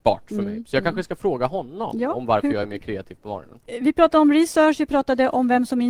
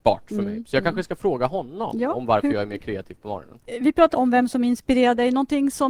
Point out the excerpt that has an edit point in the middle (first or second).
second